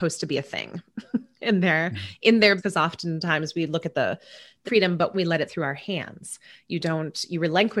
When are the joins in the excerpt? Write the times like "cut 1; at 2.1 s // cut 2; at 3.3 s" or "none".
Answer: cut 1; at 2.6 s // cut 2; at 3.9 s // cut 3; at 4.6 s // cut 4; at 5.1 s // cut 5; at 5.5 s